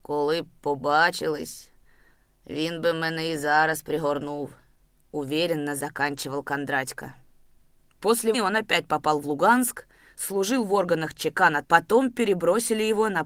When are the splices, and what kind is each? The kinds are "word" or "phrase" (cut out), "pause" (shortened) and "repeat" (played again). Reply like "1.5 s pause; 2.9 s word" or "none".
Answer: 8.3 s word; 11.6 s word

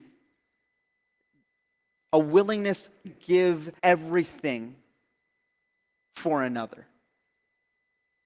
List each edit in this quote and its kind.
3.0 s word; 3.8 s pause

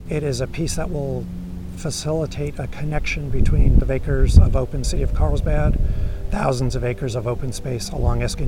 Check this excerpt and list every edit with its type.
3.8 s word; 4.8 s phrase; 6.3 s word

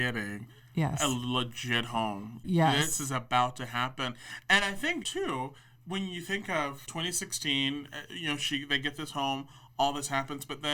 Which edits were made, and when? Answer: none

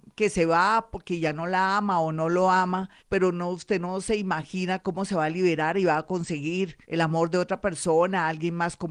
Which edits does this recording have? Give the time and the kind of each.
3.0 s pause; 6.8 s pause

